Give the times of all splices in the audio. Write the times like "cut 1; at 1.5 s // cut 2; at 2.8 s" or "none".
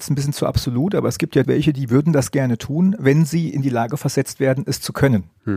cut 1; at 1.4 s